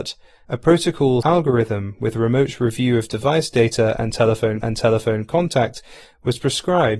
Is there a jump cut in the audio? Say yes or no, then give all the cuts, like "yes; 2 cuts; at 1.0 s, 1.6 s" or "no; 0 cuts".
yes; 2 cuts; at 1.2 s, 4.6 s